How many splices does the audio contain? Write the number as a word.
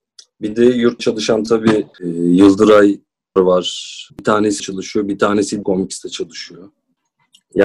six